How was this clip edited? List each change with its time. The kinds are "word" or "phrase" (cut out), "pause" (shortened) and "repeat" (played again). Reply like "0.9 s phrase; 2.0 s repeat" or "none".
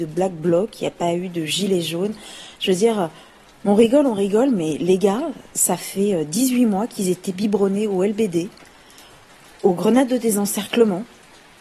none